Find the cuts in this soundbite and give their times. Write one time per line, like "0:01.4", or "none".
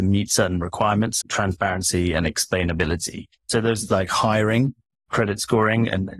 0:01.2
0:03.4
0:03.9
0:05.1